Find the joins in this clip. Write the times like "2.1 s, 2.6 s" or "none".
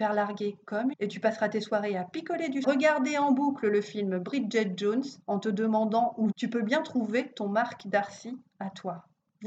0.9 s, 2.6 s, 5.2 s, 6.3 s